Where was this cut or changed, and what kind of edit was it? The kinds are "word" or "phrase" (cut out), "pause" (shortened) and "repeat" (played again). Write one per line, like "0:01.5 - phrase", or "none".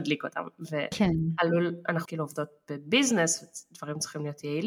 0:02.0 - word